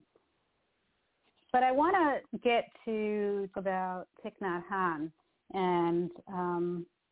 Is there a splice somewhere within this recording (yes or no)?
yes